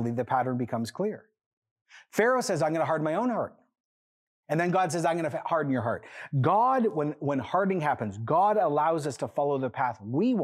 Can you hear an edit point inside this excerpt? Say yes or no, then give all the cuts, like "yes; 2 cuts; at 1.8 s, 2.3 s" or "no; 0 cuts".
no; 0 cuts